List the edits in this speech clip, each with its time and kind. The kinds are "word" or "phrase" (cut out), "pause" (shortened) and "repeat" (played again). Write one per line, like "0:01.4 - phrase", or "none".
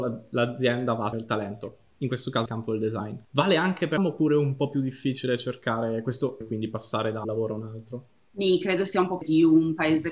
0:01.1 - word
0:02.5 - word
0:04.0 - word
0:06.4 - word
0:07.2 - word
0:09.2 - word